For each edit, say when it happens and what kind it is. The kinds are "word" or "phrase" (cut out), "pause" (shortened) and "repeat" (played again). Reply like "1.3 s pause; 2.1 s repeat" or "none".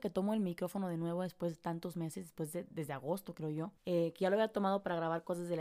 3.8 s pause